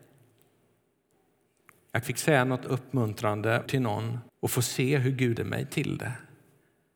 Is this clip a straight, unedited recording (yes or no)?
no